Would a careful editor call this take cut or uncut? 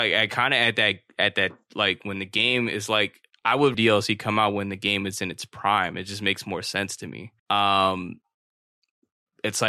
cut